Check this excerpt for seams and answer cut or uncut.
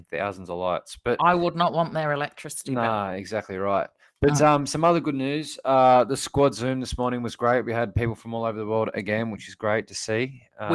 uncut